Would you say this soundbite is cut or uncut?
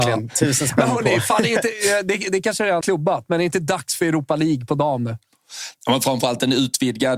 cut